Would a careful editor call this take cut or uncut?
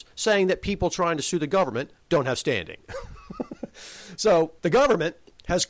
cut